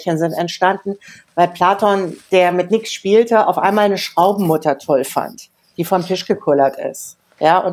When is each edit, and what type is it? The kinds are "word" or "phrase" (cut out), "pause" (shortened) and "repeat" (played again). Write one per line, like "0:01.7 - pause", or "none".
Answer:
none